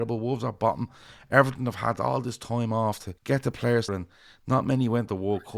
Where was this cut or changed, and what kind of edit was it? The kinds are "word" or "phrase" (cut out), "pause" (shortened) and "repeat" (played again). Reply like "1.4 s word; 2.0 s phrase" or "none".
3.2 s pause; 3.9 s word